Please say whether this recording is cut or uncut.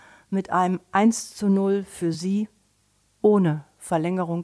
uncut